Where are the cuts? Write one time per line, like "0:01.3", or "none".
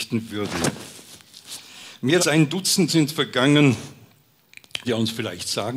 0:02.2
0:02.9
0:04.8